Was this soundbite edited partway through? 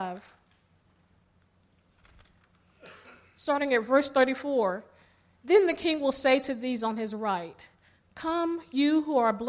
no; 0 cuts

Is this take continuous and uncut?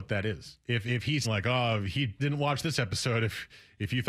no; 2 cuts; at 1.2 s, 2.2 s

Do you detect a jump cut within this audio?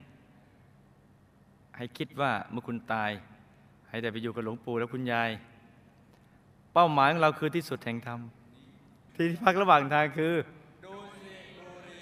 no; 0 cuts

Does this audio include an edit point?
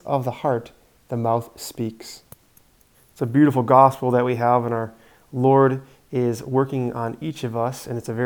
yes; 1 cut; at 2.9 s

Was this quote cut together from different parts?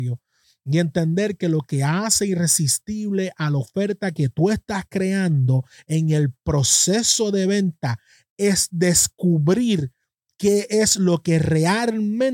no; 0 cuts

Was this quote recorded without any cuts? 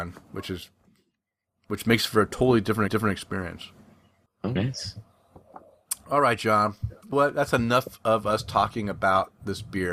no; 3 cuts; at 2.9 s, 4.6 s, 7.1 s

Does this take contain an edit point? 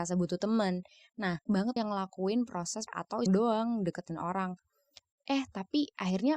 yes; 4 cuts; at 1.5 s, 1.8 s, 2.9 s, 3.3 s

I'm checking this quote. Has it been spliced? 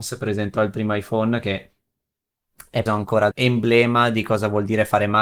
yes; 2 cuts; at 2.9 s, 3.3 s

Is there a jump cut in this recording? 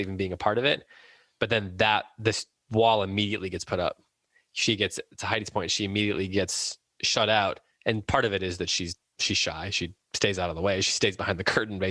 no; 0 cuts

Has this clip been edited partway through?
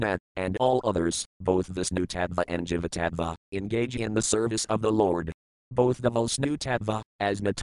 no; 0 cuts

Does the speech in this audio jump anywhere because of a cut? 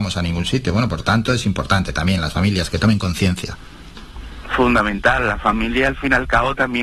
no; 0 cuts

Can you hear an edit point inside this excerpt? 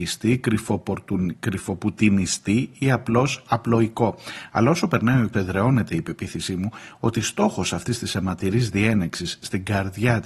yes; 1 cut; at 5.3 s

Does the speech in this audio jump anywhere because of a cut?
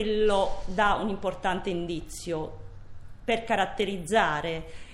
no; 0 cuts

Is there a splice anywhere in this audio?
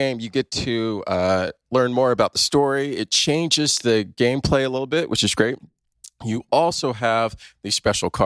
no; 0 cuts

